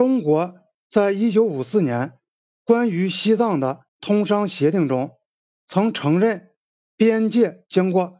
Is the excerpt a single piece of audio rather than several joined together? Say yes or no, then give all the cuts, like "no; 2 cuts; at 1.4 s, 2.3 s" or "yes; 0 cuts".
no; 1 cut; at 3.9 s